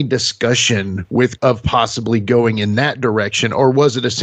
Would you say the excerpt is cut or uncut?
cut